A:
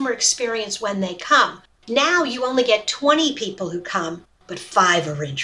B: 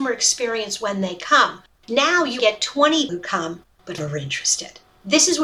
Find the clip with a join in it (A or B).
B